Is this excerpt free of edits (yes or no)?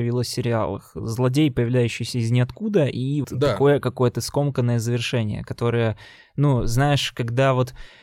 no